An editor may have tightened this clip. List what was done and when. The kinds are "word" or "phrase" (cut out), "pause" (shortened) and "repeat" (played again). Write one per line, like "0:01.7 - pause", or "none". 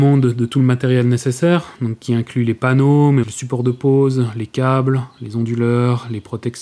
0:03.2 - word

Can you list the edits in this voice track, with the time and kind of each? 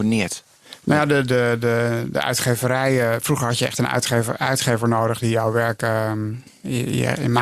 none

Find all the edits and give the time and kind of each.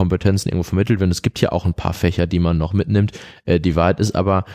none

